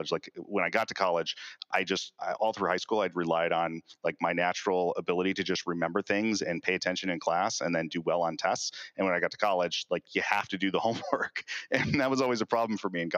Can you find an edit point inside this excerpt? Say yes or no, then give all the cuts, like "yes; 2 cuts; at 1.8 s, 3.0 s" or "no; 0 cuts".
no; 0 cuts